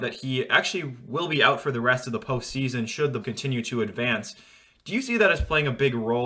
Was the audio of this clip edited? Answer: yes; 1 cut; at 3.2 s

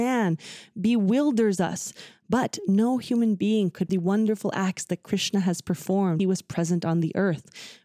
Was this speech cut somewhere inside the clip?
yes; 2 cuts; at 3.9 s, 6.2 s

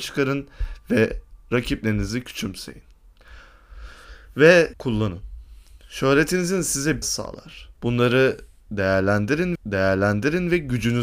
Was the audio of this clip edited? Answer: yes; 4 cuts; at 4.7 s, 7.0 s, 7.8 s, 9.6 s

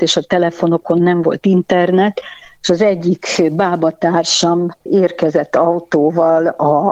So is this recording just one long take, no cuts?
yes; 0 cuts

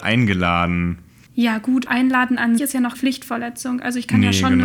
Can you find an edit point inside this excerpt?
yes; 3 cuts; at 1.9 s, 2.6 s, 2.9 s

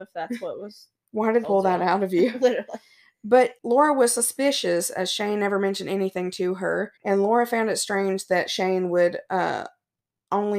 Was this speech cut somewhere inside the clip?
yes; 3 cuts; at 1.4 s, 3.6 s, 7.0 s

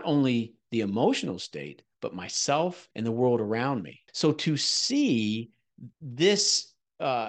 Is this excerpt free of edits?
no; 3 cuts; at 2.9 s, 4.1 s, 5.9 s

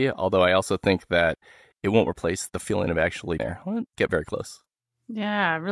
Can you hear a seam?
yes; 3 cuts; at 2.5 s, 3.4 s, 4.0 s

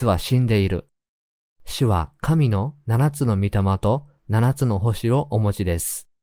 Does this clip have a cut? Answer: yes; 1 cut; at 1.3 s

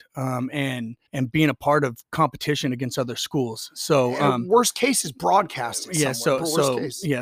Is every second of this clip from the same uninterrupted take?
no; 1 cut; at 1.1 s

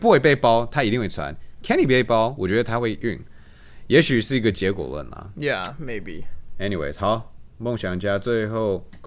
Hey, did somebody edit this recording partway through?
no; 0 cuts

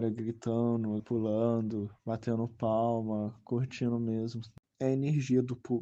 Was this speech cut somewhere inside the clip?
yes; 2 cuts; at 1.0 s, 2.0 s

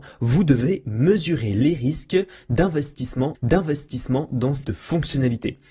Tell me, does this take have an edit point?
yes; 2 cuts; at 3.3 s, 4.6 s

